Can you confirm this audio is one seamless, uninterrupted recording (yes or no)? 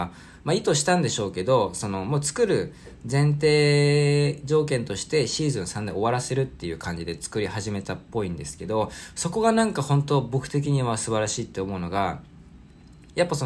yes